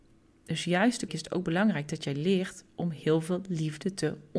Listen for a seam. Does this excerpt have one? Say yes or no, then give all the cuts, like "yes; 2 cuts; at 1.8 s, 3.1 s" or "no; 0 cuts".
yes; 1 cut; at 1.1 s